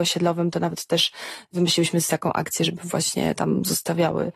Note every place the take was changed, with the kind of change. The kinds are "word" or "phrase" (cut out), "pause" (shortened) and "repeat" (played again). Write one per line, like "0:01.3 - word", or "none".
0:02.1 - word